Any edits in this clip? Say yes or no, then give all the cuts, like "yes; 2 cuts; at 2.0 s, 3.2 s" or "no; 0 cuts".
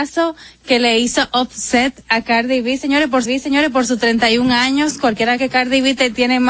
yes; 2 cuts; at 3.3 s, 5.4 s